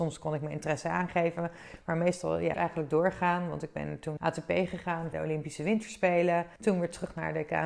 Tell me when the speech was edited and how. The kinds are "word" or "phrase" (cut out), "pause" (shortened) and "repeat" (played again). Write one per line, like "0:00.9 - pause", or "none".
0:02.5 - phrase
0:04.2 - word
0:05.1 - word
0:06.6 - pause